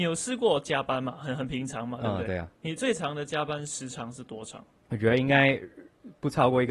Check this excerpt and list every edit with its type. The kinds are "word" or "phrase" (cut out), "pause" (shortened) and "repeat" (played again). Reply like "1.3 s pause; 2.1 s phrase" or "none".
none